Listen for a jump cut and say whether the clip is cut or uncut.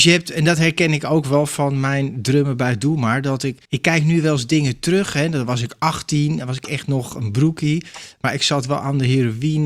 cut